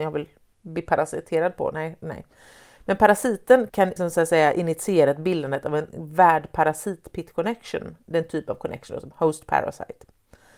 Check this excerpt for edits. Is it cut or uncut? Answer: uncut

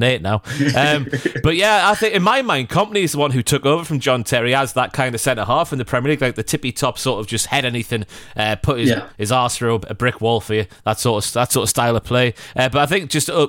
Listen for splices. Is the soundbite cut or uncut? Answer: uncut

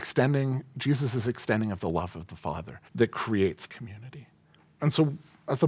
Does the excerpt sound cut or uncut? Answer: cut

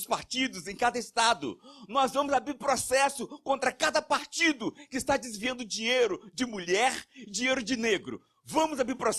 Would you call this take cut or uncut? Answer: uncut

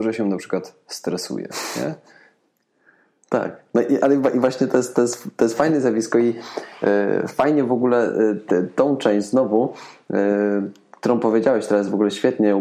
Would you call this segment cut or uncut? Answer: uncut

